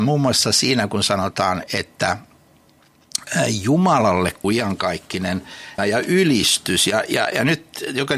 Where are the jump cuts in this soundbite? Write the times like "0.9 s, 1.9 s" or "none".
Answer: 4.4 s, 5.8 s